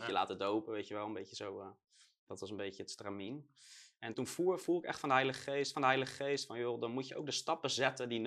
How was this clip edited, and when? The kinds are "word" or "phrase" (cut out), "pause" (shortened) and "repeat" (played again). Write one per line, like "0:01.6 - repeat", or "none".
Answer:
0:04.1 - word
0:05.7 - repeat